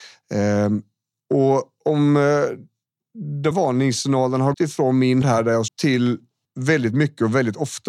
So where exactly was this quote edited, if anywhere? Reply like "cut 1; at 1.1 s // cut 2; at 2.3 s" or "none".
cut 1; at 3.5 s // cut 2; at 4.5 s // cut 3; at 5.2 s // cut 4; at 5.7 s // cut 5; at 6.4 s